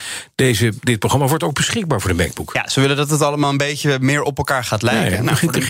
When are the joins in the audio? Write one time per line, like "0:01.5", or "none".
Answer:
none